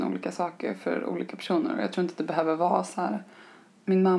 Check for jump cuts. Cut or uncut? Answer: uncut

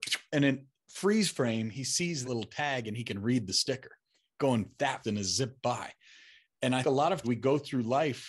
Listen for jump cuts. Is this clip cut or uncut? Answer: cut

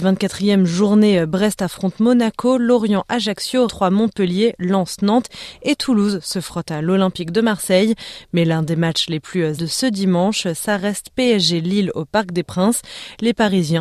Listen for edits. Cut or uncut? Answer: cut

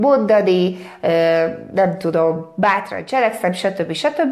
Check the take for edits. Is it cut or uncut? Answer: uncut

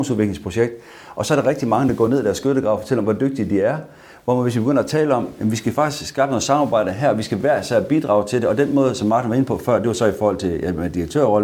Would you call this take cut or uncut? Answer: uncut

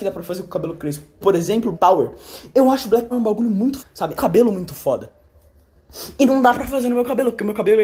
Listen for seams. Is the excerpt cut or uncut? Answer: cut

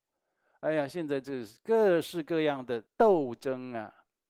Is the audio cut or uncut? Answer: cut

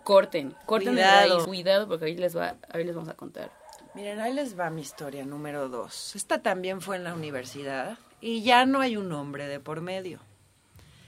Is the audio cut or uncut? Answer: cut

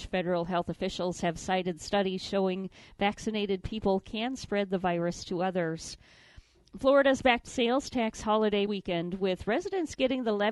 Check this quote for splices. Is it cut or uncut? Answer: cut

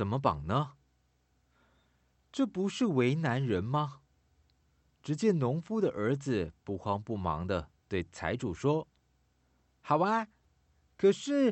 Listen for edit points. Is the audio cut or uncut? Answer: uncut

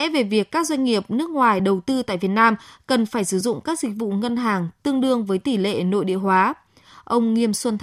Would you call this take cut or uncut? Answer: uncut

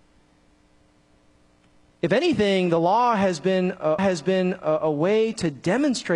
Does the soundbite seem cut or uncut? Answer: cut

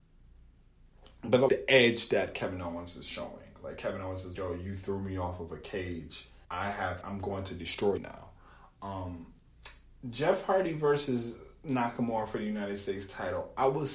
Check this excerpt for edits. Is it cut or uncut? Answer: cut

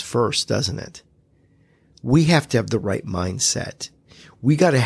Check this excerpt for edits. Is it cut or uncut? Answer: uncut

